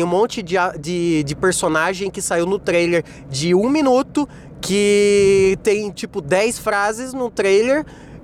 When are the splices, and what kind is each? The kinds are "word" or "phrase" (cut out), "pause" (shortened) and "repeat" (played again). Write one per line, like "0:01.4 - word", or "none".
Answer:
none